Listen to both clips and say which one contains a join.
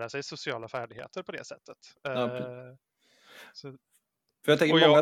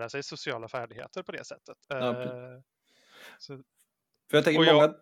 second; 1 cut; at 1.8 s

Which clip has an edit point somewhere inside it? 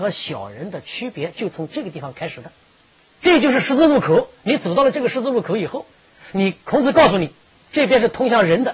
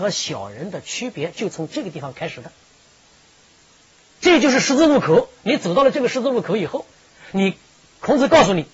first; 3 cuts; at 2.7 s, 6.6 s, 7.4 s

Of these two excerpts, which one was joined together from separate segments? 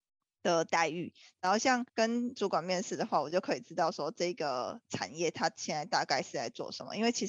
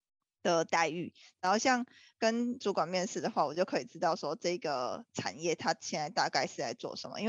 first; 1 cut; at 1.9 s

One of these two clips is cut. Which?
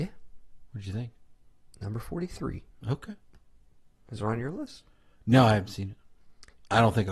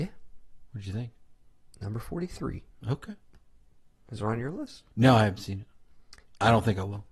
second; 1 cut; at 4.9 s

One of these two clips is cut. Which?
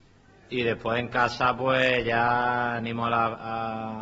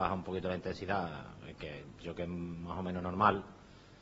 second; 1 cut; at 2.1 s

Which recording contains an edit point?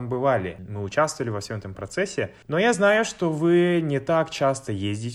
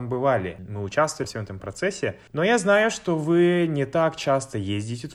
second; 1 cut; at 1.2 s

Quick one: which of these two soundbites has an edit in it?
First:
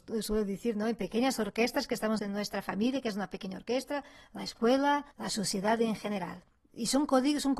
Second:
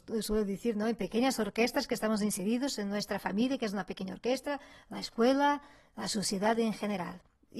first; 2 cuts; at 2.2 s, 5.1 s

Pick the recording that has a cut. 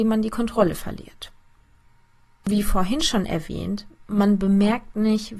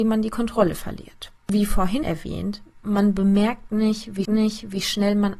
second; 3 cuts; at 1.4 s, 2.0 s, 4.2 s

